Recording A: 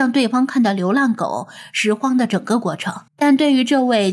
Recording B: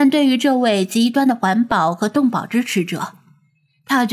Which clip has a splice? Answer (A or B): A